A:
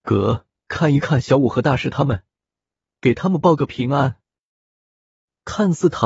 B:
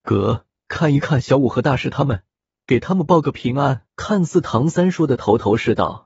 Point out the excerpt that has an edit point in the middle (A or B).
B